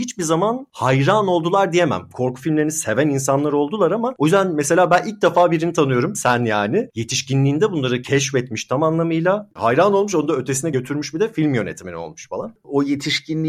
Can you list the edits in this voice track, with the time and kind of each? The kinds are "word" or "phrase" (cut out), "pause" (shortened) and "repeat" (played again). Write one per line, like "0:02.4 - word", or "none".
none